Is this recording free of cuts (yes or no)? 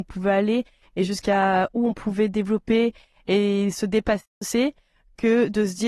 yes